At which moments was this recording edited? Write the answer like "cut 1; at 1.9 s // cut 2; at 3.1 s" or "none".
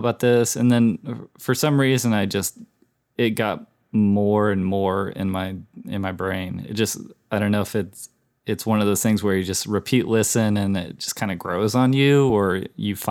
none

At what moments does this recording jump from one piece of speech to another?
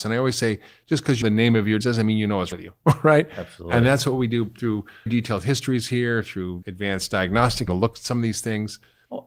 cut 1; at 1.2 s // cut 2; at 1.8 s // cut 3; at 2.5 s // cut 4; at 5.1 s // cut 5; at 6.6 s // cut 6; at 7.7 s

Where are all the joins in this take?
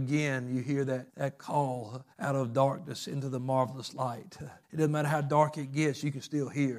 cut 1; at 1.1 s // cut 2; at 2.1 s // cut 3; at 4.6 s

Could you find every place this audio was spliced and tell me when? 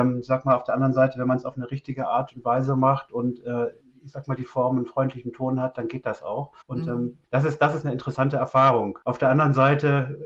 cut 1; at 3.8 s // cut 2; at 6.6 s // cut 3; at 7.2 s // cut 4; at 9.0 s

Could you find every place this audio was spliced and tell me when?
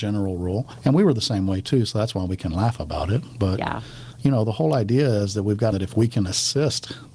cut 1; at 5.7 s

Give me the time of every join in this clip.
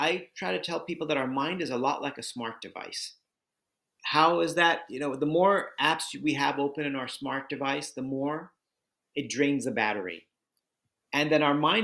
none

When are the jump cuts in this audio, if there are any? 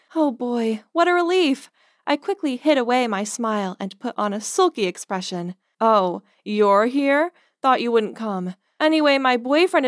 none

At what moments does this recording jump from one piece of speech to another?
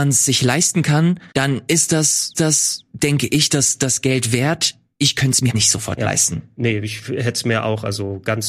cut 1; at 1.3 s // cut 2; at 2.3 s // cut 3; at 5.5 s

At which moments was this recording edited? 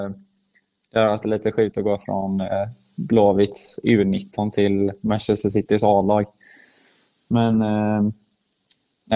none

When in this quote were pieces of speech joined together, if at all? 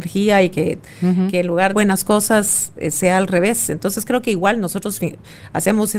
cut 1; at 1.7 s

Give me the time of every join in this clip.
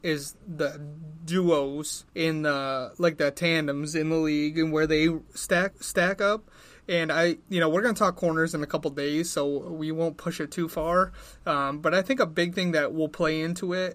cut 1; at 2.1 s // cut 2; at 5.7 s // cut 3; at 7.4 s

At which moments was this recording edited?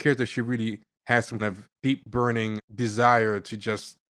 cut 1; at 1.4 s // cut 2; at 2.6 s

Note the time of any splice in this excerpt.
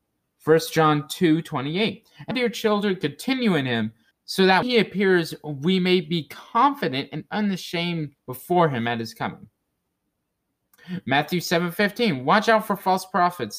cut 1; at 2.3 s // cut 2; at 4.1 s // cut 3; at 4.6 s // cut 4; at 8.2 s

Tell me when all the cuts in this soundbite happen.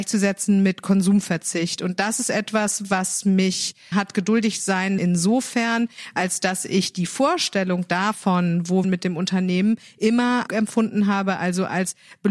cut 1; at 3.9 s // cut 2; at 5.0 s // cut 3; at 8.8 s // cut 4; at 10.5 s

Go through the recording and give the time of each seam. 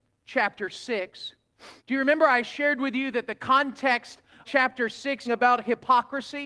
cut 1; at 1.8 s // cut 2; at 4.4 s // cut 3; at 5.3 s

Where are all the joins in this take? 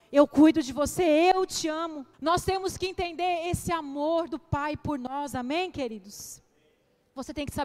cut 1; at 2.1 s

